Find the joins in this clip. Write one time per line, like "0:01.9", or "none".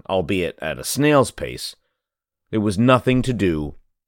none